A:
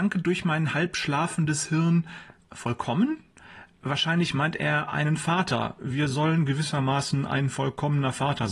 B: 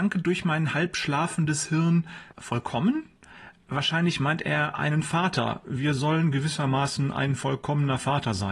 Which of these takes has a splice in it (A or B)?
B